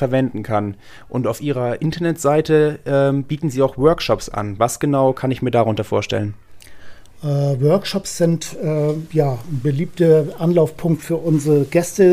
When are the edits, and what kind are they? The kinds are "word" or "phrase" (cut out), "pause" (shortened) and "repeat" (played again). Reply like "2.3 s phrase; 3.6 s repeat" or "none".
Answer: none